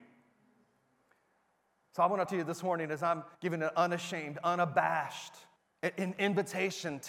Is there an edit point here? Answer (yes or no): yes